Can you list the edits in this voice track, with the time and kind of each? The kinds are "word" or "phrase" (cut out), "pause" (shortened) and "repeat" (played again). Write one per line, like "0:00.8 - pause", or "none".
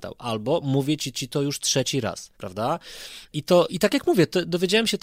0:01.1 - repeat
0:02.3 - pause
0:03.7 - word